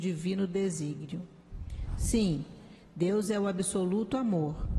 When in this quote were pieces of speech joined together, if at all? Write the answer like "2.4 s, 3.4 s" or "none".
none